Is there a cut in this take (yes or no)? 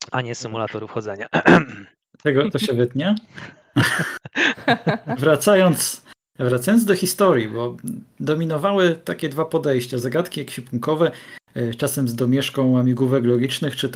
no